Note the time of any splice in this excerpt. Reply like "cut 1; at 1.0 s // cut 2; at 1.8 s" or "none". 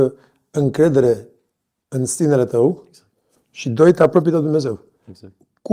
none